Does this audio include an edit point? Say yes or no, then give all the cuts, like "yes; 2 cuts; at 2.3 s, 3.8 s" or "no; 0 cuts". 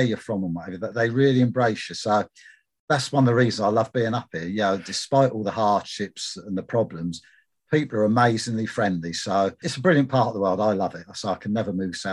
yes; 2 cuts; at 0.9 s, 9.6 s